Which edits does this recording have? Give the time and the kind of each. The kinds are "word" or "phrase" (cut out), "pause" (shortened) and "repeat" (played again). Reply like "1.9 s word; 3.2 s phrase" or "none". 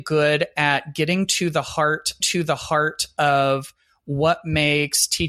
2.2 s repeat